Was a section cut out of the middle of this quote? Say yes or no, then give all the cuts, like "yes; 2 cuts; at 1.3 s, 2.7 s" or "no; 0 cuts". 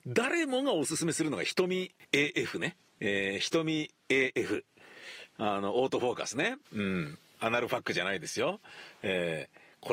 yes; 2 cuts; at 2.9 s, 6.6 s